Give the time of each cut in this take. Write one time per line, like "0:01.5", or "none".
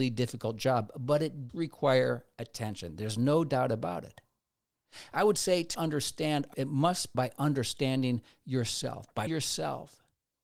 0:01.5
0:05.7
0:06.5
0:07.1
0:09.3